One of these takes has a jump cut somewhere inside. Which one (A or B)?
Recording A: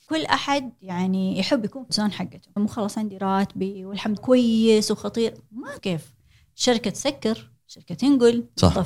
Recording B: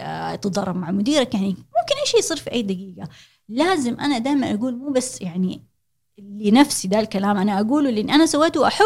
A